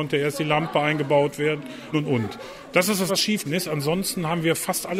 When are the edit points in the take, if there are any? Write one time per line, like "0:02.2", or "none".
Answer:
0:01.9
0:03.1
0:03.4